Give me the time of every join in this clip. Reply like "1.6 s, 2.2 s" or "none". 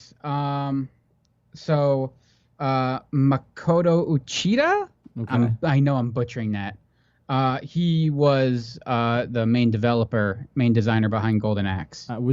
none